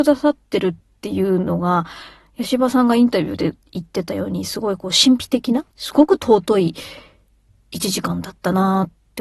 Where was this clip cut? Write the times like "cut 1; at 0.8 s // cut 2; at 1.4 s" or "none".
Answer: cut 1; at 5.7 s